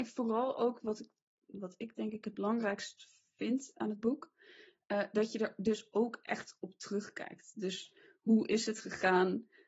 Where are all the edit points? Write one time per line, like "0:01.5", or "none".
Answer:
none